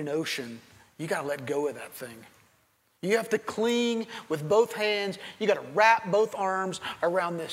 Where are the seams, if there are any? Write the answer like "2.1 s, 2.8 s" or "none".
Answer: none

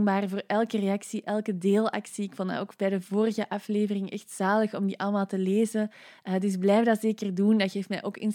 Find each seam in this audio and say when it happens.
none

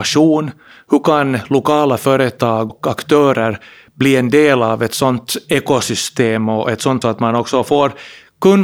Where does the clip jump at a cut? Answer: 2.7 s, 7.0 s

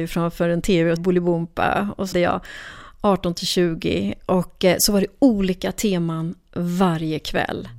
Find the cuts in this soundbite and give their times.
1.0 s, 2.1 s

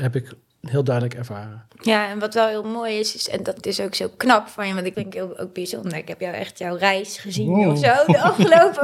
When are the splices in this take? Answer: 3.6 s, 4.9 s

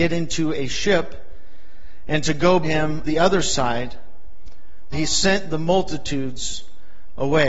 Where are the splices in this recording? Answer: 2.6 s, 3.0 s, 4.9 s

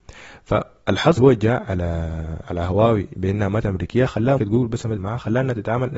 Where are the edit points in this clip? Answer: 1.2 s, 2.4 s, 3.1 s, 3.6 s, 4.4 s, 5.0 s

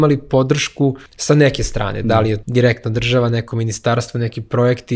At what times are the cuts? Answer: 1.1 s, 2.4 s

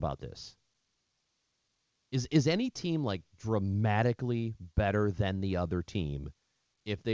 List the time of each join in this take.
none

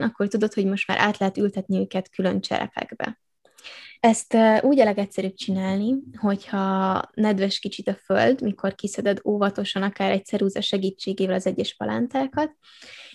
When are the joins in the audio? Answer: 4.0 s

